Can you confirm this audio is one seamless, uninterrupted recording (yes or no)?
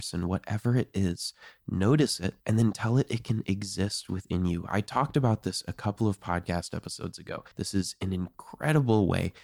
no